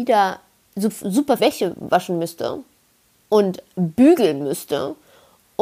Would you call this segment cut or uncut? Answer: cut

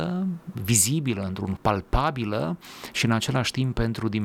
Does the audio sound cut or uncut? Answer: cut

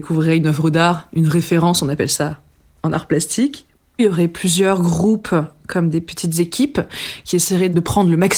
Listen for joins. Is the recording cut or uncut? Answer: uncut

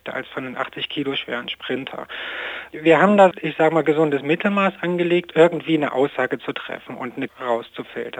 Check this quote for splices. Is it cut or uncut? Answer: cut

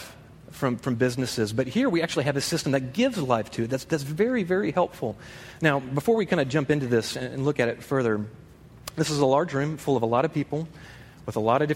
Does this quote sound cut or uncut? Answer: uncut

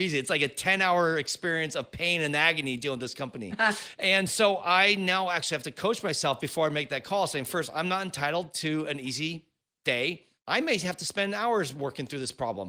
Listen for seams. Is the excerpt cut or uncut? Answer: uncut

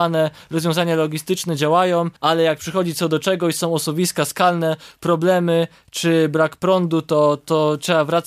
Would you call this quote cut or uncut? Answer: cut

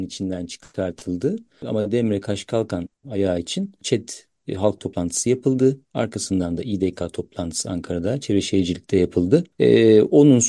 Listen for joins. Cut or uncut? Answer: uncut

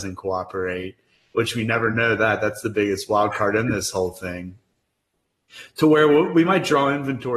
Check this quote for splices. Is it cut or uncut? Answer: uncut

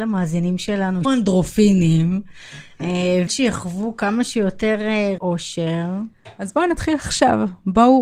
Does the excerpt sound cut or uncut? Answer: cut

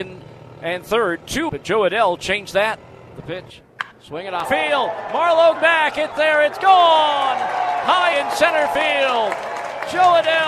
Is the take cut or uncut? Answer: cut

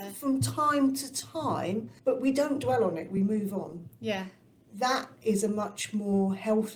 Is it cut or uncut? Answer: uncut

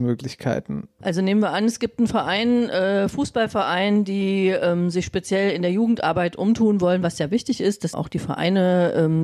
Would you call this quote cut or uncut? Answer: cut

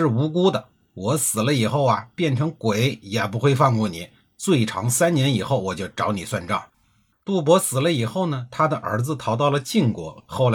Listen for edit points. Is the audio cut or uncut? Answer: cut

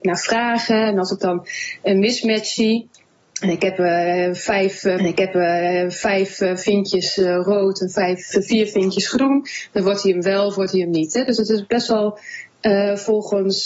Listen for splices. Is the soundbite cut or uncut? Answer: cut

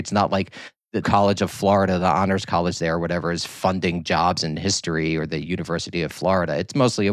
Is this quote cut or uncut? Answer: cut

